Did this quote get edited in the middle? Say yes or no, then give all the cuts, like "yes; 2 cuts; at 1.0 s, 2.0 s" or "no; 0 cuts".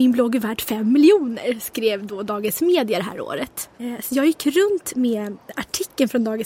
yes; 1 cut; at 3.7 s